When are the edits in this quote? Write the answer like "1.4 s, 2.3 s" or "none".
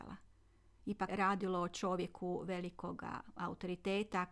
1.1 s